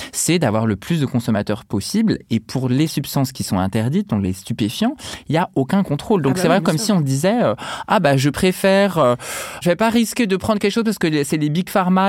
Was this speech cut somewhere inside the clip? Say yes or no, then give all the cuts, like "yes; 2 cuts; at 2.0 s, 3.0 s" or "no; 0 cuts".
no; 0 cuts